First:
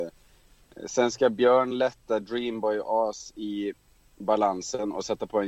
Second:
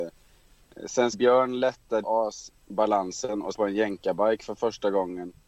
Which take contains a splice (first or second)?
second